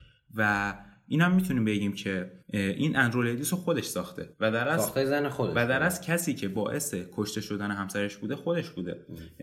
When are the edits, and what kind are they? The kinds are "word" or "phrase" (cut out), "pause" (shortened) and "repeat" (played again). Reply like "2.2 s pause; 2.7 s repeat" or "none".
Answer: 2.4 s pause; 4.3 s pause

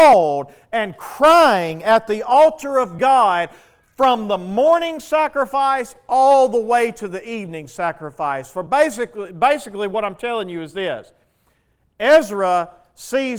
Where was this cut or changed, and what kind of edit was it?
none

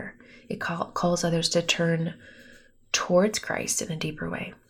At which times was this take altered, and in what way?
none

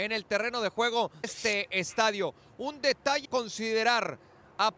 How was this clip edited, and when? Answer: 1.2 s word; 3.2 s word

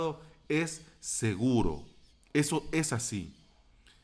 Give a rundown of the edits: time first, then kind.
2.1 s pause

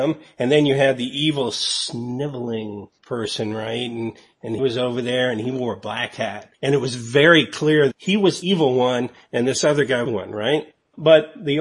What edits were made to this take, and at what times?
4.6 s word; 6.5 s pause; 7.9 s word; 8.4 s word; 10.0 s phrase

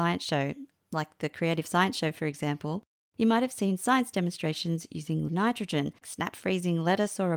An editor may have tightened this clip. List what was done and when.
5.3 s word; 6.0 s word

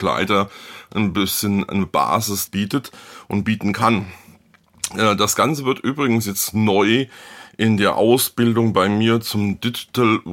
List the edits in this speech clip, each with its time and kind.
2.5 s phrase

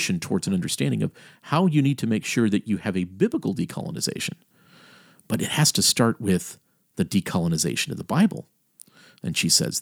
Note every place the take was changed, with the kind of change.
none

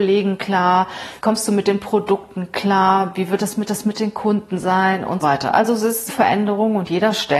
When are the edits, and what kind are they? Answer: 1.2 s pause; 3.7 s repeat; 5.2 s word; 6.1 s word

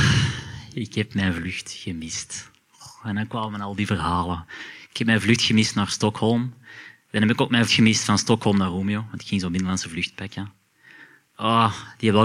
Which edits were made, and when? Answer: 7.7 s word

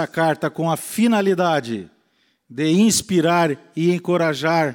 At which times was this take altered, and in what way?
none

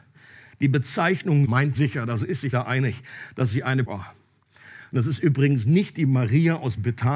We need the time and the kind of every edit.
1.4 s word; 1.7 s word; 2.5 s word; 3.8 s word

